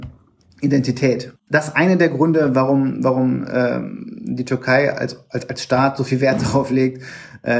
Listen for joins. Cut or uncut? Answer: cut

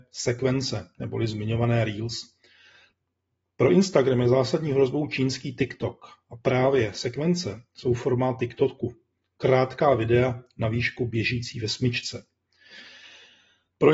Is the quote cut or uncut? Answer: uncut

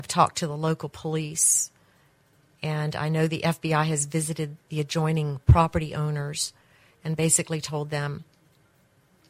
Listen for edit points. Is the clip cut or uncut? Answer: uncut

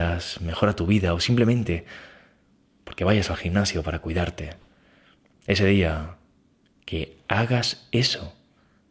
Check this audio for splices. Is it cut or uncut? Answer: uncut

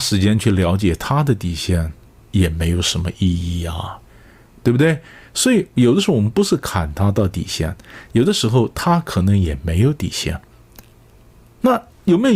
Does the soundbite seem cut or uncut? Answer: uncut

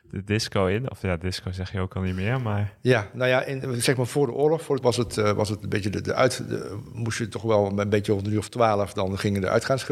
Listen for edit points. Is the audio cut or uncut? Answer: cut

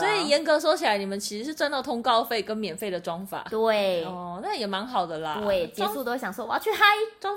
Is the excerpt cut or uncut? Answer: uncut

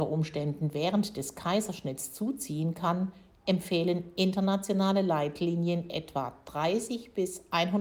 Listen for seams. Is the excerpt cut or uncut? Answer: uncut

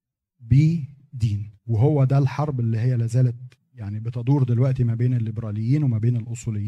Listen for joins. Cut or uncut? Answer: cut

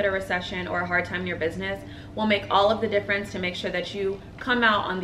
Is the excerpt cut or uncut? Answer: uncut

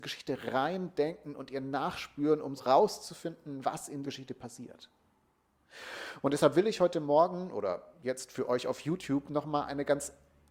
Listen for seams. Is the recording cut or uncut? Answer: cut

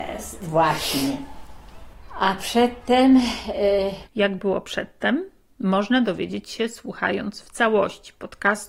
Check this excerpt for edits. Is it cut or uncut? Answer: uncut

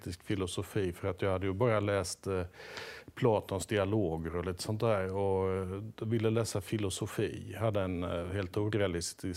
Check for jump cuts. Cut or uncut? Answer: uncut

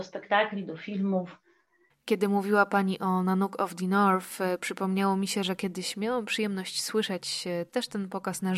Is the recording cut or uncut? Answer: uncut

